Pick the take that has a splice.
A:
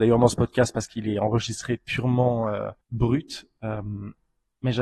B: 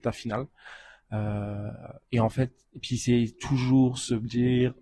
A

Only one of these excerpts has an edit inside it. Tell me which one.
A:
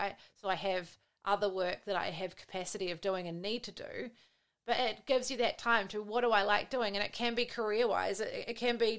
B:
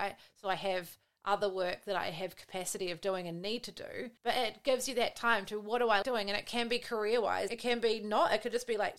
B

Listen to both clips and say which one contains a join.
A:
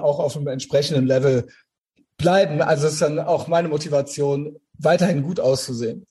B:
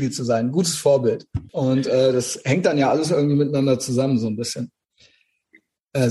B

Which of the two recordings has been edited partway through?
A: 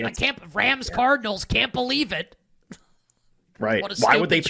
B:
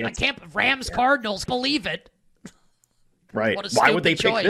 B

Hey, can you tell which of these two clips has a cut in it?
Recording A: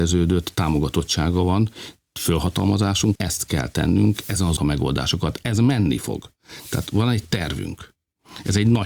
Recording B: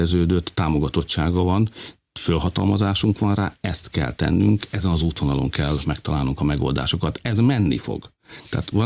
A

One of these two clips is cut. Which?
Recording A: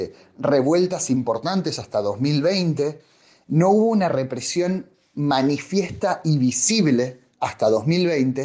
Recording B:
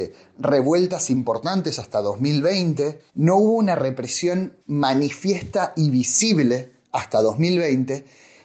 B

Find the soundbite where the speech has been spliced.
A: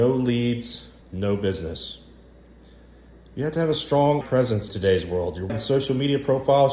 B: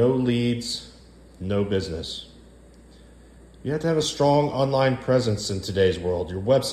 A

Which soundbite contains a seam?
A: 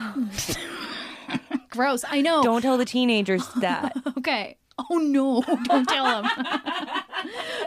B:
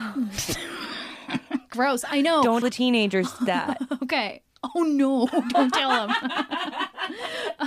B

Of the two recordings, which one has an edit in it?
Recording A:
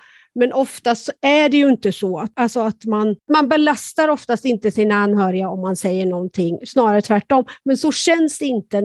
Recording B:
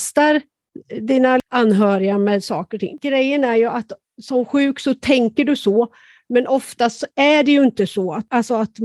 A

